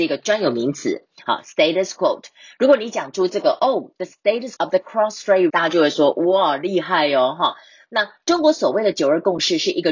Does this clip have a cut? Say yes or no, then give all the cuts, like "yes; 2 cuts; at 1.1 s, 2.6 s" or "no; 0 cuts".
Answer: yes; 2 cuts; at 4.6 s, 5.5 s